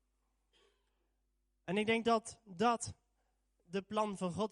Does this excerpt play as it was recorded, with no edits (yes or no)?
yes